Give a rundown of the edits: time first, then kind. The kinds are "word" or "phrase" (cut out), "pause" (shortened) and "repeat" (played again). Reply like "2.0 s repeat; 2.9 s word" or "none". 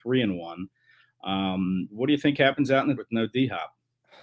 3.0 s word